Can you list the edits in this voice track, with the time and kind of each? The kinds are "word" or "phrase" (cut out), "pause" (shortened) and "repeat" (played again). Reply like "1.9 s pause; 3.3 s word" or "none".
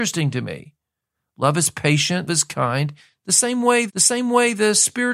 2.3 s word; 3.9 s repeat